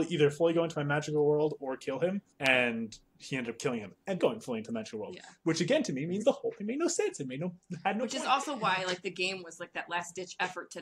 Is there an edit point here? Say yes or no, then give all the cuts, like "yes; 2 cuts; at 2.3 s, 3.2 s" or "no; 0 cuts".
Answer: yes; 2 cuts; at 2.3 s, 4.2 s